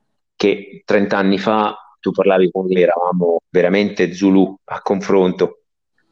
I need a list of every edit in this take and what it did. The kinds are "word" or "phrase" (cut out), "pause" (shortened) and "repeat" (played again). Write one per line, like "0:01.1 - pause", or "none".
0:02.0 - word
0:02.8 - phrase
0:03.5 - pause